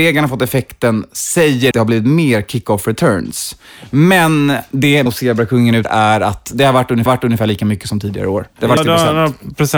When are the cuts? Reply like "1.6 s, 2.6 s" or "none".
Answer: 1.7 s, 5.1 s, 5.8 s, 7.1 s, 8.8 s